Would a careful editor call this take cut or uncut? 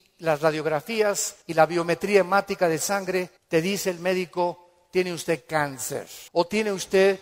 cut